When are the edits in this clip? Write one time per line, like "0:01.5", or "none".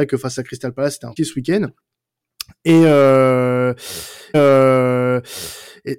0:01.2
0:04.3